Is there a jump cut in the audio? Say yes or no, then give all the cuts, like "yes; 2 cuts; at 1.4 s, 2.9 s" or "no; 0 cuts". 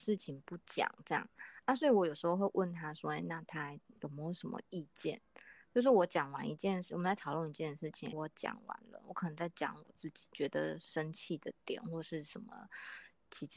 yes; 1 cut; at 8.1 s